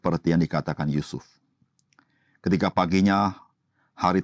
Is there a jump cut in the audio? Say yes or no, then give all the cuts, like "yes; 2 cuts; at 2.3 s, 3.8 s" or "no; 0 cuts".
no; 0 cuts